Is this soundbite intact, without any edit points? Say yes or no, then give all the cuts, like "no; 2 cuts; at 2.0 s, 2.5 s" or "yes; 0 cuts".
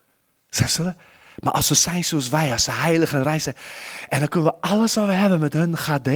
yes; 0 cuts